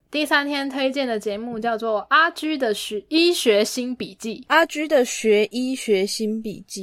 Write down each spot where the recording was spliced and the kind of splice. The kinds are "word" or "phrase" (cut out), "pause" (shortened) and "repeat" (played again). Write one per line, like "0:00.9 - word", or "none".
none